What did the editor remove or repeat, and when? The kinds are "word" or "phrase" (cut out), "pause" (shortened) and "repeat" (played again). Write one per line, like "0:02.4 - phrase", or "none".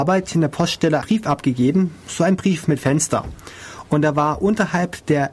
0:01.0 - word